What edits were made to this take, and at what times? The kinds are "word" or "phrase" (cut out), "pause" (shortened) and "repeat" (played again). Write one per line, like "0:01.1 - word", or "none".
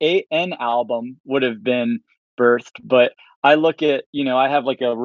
none